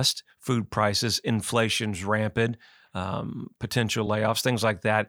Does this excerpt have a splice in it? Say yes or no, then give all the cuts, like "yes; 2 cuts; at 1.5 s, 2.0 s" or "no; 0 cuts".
no; 0 cuts